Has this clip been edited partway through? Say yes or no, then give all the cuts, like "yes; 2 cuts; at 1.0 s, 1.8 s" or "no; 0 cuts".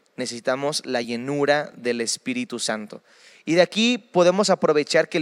no; 0 cuts